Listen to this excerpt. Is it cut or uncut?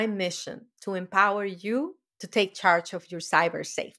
cut